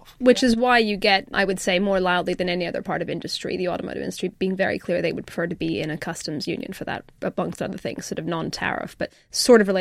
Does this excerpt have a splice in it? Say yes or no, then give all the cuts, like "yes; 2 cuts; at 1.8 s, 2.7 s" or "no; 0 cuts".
no; 0 cuts